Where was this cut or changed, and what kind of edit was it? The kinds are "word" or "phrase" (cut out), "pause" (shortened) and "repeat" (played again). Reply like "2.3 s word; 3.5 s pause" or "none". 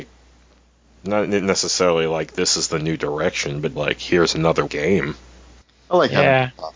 3.8 s word; 4.7 s phrase